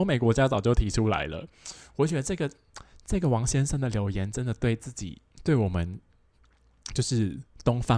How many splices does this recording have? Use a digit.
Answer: 0